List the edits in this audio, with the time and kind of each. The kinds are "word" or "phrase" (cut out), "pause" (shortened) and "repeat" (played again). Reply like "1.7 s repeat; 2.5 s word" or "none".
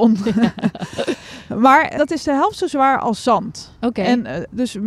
2.0 s word